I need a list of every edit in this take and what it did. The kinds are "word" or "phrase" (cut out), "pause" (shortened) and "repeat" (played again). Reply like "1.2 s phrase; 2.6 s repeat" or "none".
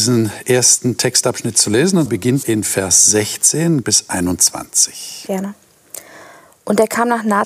2.1 s word; 2.4 s word; 3.8 s word